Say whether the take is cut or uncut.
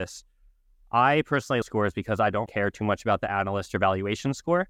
cut